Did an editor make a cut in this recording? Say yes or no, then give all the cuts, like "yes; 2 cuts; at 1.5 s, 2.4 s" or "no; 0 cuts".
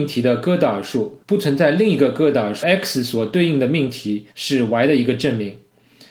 yes; 3 cuts; at 1.2 s, 2.6 s, 4.3 s